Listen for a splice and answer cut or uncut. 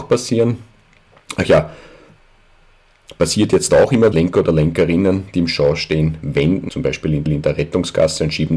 cut